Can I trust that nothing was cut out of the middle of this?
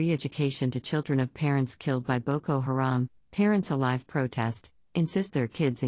yes; 0 cuts

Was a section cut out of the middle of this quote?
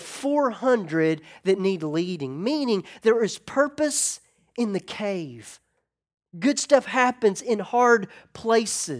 no; 0 cuts

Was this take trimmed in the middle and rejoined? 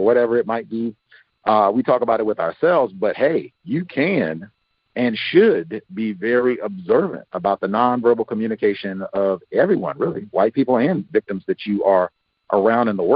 yes; 1 cut; at 3.6 s

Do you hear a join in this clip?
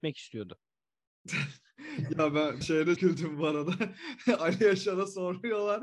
yes; 2 cuts; at 2.6 s, 3.0 s

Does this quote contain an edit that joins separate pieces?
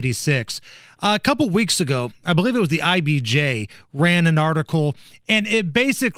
no; 0 cuts

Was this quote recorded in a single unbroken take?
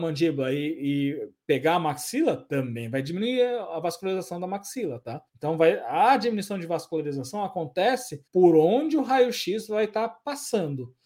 no; 2 cuts; at 5.3 s, 8.3 s

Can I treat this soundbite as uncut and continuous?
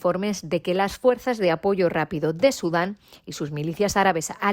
yes; 0 cuts

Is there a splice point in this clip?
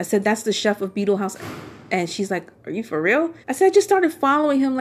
yes; 1 cut; at 3.4 s

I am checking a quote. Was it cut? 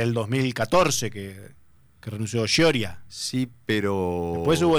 no; 0 cuts

